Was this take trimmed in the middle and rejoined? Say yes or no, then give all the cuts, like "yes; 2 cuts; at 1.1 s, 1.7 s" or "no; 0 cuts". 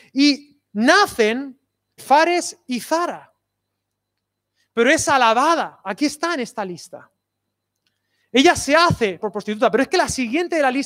yes; 2 cuts; at 2.0 s, 9.2 s